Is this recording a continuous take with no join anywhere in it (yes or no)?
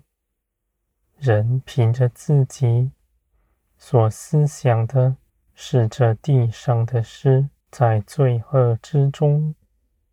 no